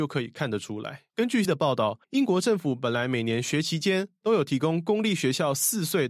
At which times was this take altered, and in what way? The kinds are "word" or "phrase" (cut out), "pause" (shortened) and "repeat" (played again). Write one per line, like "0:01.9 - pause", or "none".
0:01.1 - pause
0:01.4 - word
0:02.0 - pause